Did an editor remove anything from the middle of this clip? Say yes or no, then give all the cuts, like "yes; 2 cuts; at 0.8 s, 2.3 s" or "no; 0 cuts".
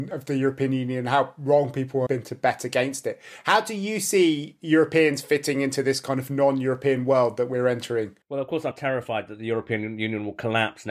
yes; 3 cuts; at 2.1 s, 8.2 s, 8.7 s